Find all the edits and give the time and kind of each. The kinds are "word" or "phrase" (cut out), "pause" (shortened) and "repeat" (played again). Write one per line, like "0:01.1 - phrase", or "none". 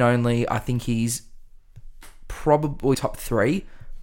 0:02.9 - phrase